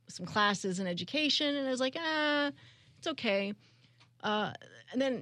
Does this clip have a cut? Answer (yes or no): no